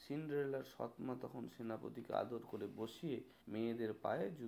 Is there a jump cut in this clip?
yes; 1 cut; at 3.4 s

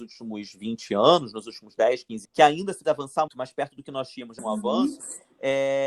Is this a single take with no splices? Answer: no; 4 cuts; at 2.2 s, 2.8 s, 3.3 s, 4.4 s

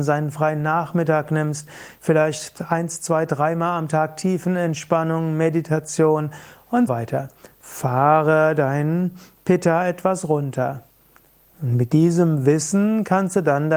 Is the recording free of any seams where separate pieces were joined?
no; 1 cut; at 6.9 s

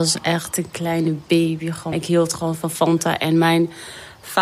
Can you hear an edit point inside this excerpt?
yes; 1 cut; at 1.9 s

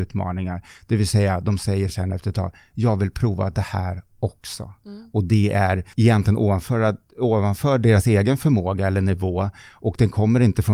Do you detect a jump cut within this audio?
yes; 1 cut; at 5.9 s

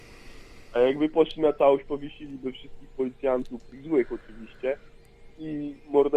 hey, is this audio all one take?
yes; 0 cuts

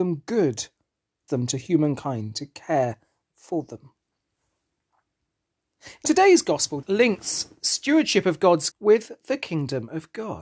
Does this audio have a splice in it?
yes; 4 cuts; at 1.3 s, 6.1 s, 6.8 s, 8.7 s

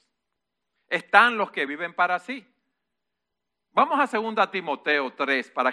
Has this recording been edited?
no; 0 cuts

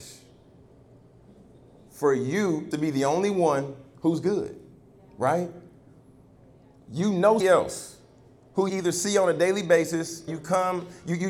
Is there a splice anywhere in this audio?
yes; 5 cuts; at 2.7 s, 4.7 s, 7.4 s, 8.7 s, 10.3 s

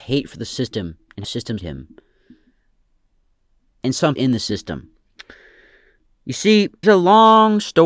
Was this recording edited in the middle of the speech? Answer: yes; 4 cuts; at 1.2 s, 1.6 s, 4.2 s, 6.8 s

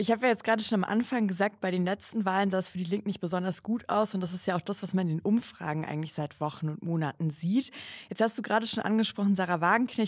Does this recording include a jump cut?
no; 0 cuts

